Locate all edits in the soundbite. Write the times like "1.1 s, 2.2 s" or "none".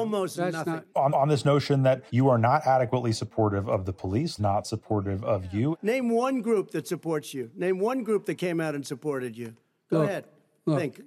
1.1 s, 2.1 s, 4.4 s